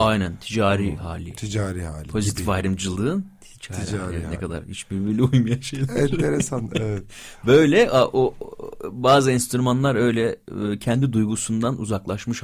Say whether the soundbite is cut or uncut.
uncut